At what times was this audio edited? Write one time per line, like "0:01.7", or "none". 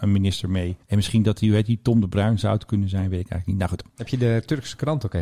none